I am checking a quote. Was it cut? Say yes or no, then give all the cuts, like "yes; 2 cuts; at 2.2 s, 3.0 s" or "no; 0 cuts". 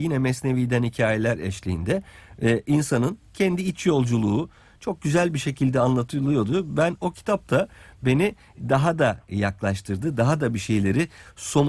no; 0 cuts